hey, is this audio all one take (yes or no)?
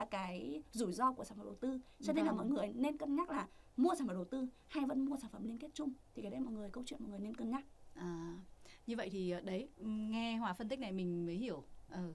yes